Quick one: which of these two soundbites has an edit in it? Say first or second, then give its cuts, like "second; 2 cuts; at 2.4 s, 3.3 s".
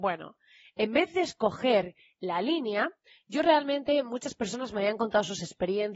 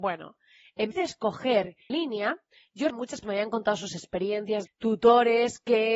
second; 5 cuts; at 0.9 s, 1.9 s, 2.9 s, 3.2 s, 4.7 s